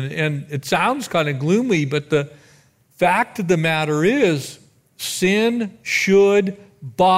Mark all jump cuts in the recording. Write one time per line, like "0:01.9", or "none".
none